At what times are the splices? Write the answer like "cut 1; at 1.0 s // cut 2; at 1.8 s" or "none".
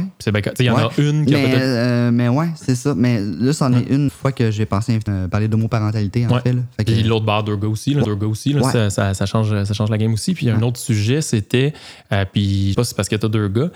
cut 1; at 4.1 s // cut 2; at 5.1 s // cut 3; at 8.0 s // cut 4; at 12.7 s

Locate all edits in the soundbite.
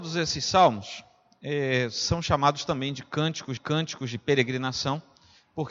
cut 1; at 3.6 s

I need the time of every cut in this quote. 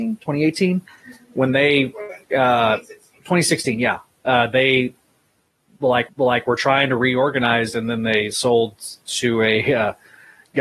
cut 1; at 2.2 s // cut 2; at 6.1 s // cut 3; at 9.0 s

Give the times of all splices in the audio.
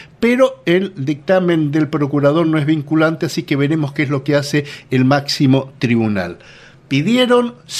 none

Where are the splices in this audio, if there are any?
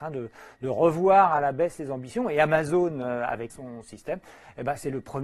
cut 1; at 3.5 s

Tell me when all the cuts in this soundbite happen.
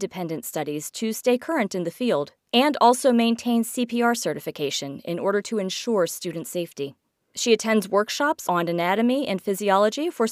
none

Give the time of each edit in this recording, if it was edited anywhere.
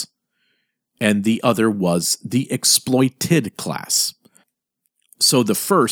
none

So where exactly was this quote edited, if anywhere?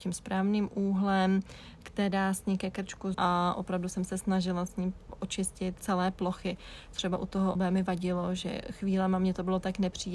cut 1; at 3.1 s // cut 2; at 5.8 s // cut 3; at 6.9 s // cut 4; at 7.6 s

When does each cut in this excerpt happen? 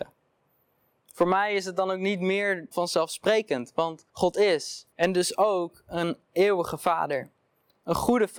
cut 1; at 2.7 s // cut 2; at 4.1 s // cut 3; at 4.9 s

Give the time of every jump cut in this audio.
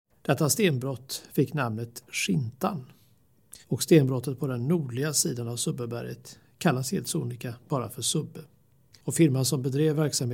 cut 1; at 3.6 s

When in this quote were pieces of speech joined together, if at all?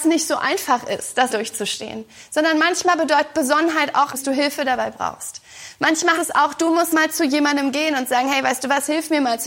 cut 1; at 1.3 s // cut 2; at 4.1 s // cut 3; at 6.2 s // cut 4; at 6.9 s

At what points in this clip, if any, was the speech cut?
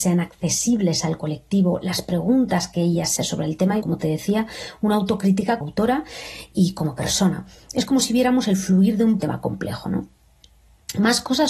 cut 1; at 3.2 s // cut 2; at 3.8 s // cut 3; at 5.6 s // cut 4; at 9.2 s

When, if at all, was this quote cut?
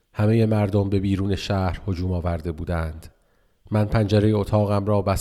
none

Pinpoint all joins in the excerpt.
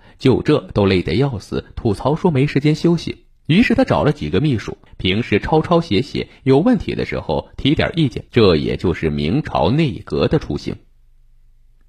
cut 1; at 3.4 s // cut 2; at 4.9 s // cut 3; at 8.3 s

